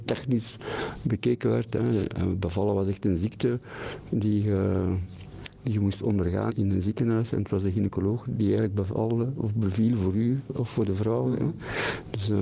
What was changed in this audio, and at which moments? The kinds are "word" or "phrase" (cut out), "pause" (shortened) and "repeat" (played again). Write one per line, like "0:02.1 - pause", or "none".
0:06.5 - word